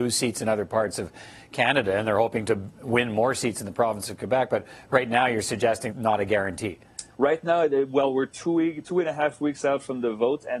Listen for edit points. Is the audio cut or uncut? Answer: cut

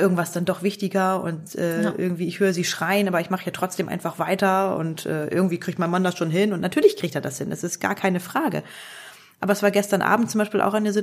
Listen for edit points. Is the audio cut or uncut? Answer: uncut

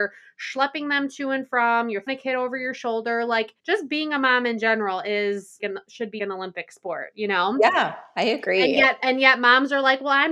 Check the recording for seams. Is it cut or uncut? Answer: cut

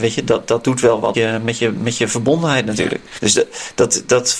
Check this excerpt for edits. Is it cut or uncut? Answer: cut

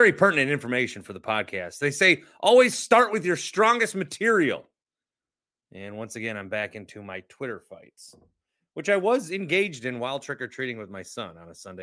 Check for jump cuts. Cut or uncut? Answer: uncut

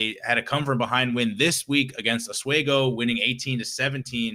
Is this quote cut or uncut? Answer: uncut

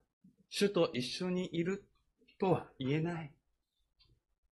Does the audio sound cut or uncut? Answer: uncut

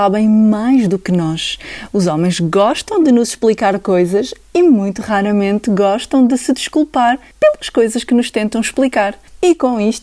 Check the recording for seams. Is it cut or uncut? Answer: uncut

